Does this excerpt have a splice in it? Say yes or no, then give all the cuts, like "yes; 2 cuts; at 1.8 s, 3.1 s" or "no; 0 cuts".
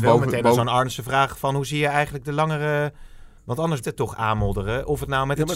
yes; 2 cuts; at 3.4 s, 3.8 s